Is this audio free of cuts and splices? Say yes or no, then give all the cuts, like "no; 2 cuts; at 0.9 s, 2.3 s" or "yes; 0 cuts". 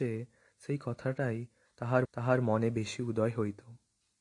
no; 1 cut; at 2.0 s